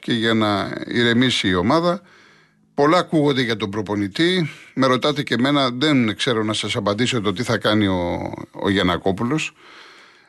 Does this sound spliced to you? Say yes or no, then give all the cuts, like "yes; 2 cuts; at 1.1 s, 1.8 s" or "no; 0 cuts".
no; 0 cuts